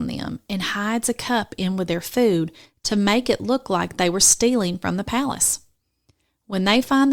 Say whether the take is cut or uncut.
uncut